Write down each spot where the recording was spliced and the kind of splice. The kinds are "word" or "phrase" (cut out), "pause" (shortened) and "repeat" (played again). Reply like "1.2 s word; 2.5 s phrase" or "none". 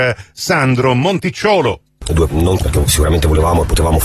2.3 s word; 2.6 s word